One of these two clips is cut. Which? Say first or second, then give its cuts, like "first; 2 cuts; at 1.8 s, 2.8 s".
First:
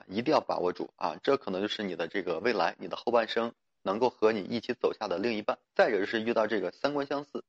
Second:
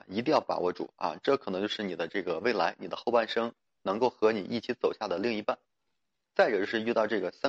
first; 1 cut; at 5.6 s